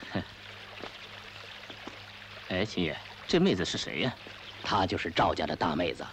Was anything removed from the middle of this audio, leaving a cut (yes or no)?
yes